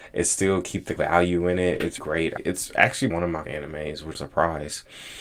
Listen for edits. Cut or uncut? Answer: cut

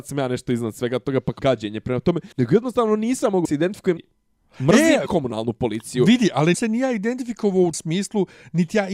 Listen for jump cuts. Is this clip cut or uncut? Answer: cut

